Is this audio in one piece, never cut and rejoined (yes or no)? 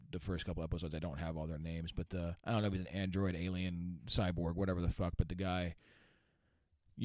no